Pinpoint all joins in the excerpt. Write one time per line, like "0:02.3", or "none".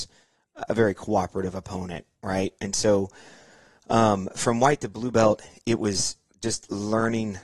none